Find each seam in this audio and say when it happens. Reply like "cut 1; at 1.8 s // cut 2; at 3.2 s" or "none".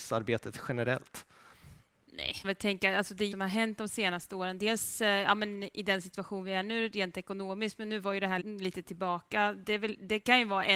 cut 1; at 2.4 s // cut 2; at 3.3 s // cut 3; at 8.4 s